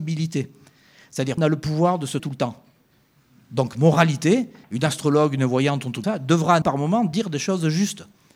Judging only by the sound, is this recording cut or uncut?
cut